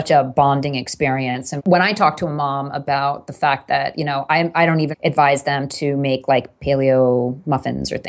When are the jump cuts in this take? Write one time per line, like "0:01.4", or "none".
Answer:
0:01.6
0:04.9